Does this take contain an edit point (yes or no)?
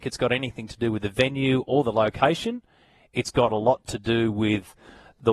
no